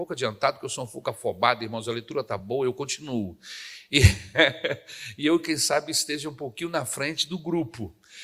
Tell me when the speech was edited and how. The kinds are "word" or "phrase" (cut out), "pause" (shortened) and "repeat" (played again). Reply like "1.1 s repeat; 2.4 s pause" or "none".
none

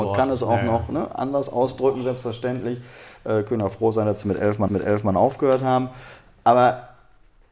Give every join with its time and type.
4.7 s repeat

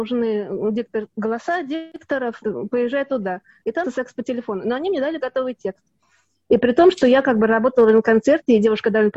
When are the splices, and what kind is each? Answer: 2.4 s word; 3.8 s word; 5.2 s word

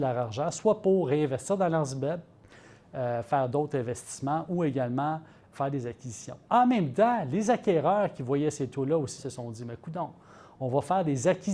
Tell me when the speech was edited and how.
5.5 s word; 6.4 s pause; 9.2 s word

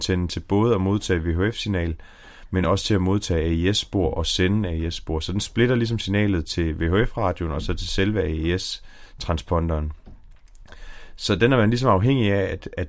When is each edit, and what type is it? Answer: none

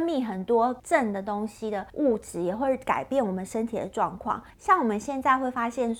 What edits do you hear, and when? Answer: 4.5 s pause

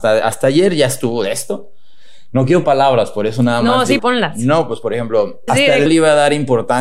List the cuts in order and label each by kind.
2.6 s word; 4.0 s word; 5.5 s phrase; 5.9 s phrase

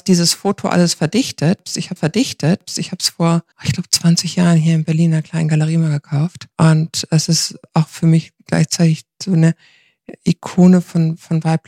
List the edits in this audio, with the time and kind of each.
2.0 s repeat; 3.5 s pause; 6.5 s pause

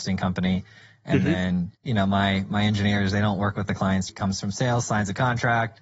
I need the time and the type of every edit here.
1.8 s pause; 4.1 s word

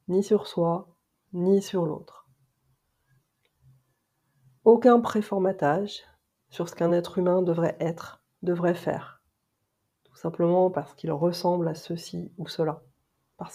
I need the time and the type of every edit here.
none

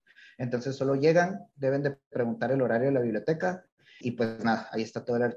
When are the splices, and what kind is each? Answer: 4.0 s word

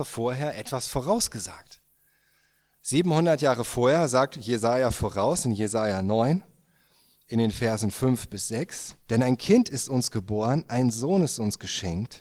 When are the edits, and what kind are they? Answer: 9.0 s pause

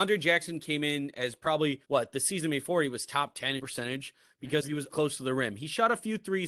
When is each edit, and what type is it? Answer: 1.8 s pause; 3.6 s phrase; 4.9 s word

